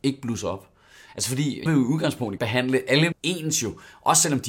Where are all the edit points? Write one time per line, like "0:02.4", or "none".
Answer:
0:01.7
0:02.4
0:03.1